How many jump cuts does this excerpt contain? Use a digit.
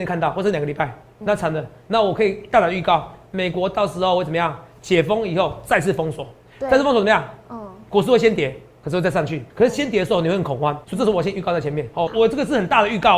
6